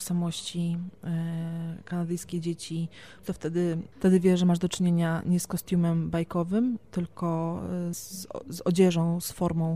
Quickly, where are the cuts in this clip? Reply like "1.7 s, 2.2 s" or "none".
3.2 s, 7.9 s